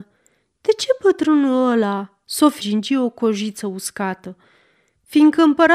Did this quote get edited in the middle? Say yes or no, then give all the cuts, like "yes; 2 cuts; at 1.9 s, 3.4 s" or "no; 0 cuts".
yes; 1 cut; at 2.6 s